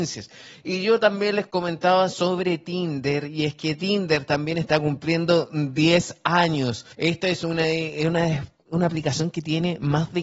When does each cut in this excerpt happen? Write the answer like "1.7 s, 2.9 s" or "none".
6.9 s

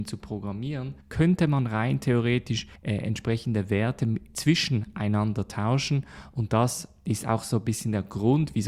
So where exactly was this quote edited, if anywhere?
1.0 s, 2.8 s

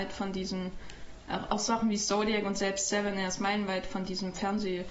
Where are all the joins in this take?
none

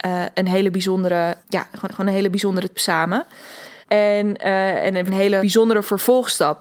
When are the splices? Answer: 1.4 s, 1.8 s, 2.7 s, 3.8 s, 5.1 s, 5.4 s

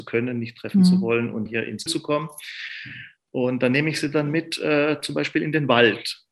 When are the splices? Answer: 1.5 s, 1.9 s

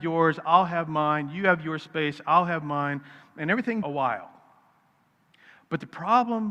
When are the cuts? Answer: 3.8 s

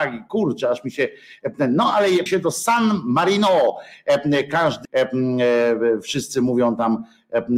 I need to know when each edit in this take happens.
2.3 s, 4.8 s

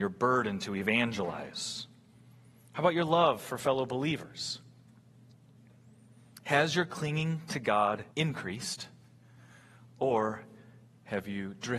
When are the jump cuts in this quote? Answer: 8.1 s

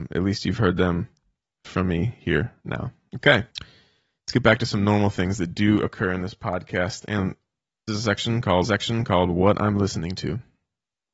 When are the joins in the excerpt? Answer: 3.5 s, 7.9 s, 8.6 s

